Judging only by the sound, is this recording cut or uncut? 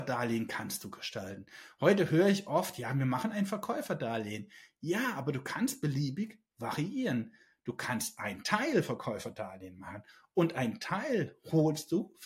uncut